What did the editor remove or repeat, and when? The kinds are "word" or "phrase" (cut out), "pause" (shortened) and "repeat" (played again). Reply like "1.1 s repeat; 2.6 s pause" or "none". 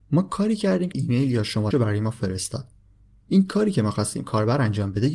0.9 s word; 1.7 s word